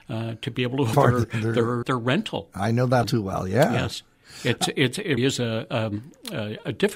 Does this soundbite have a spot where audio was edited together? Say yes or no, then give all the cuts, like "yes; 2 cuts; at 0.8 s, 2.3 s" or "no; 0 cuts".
yes; 4 cuts; at 0.9 s, 1.8 s, 3.0 s, 5.2 s